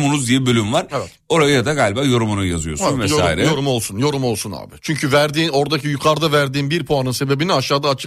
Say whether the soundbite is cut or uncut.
uncut